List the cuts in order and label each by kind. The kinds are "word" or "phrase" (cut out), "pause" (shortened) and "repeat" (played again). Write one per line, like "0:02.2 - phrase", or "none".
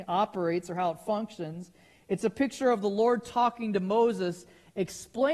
none